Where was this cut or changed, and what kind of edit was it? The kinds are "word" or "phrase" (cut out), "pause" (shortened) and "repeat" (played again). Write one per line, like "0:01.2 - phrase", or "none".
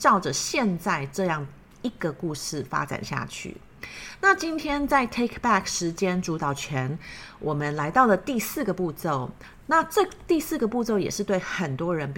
none